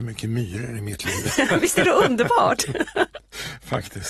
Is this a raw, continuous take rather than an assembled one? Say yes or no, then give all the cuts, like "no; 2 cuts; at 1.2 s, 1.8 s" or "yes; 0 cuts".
yes; 0 cuts